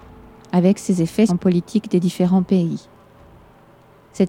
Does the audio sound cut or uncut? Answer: cut